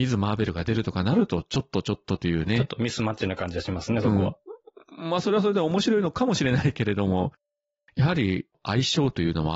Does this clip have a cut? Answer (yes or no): no